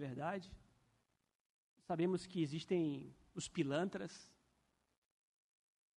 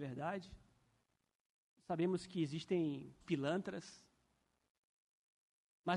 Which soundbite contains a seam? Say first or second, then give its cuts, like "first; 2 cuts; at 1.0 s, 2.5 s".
second; 1 cut; at 3.2 s